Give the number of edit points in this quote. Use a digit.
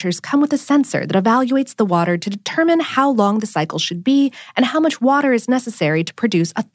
0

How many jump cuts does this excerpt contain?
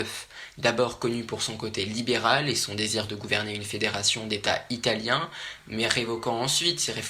0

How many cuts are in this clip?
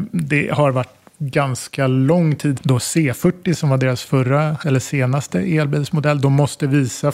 1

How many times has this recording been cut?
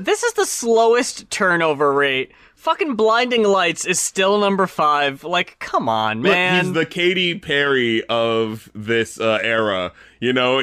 0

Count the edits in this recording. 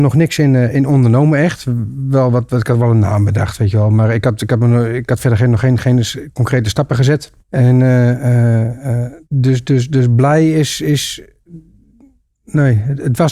2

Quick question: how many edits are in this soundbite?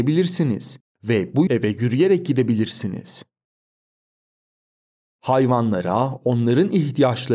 1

